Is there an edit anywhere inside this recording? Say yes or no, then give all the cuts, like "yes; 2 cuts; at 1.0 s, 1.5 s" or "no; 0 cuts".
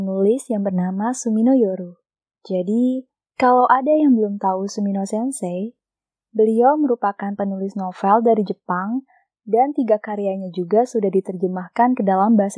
no; 0 cuts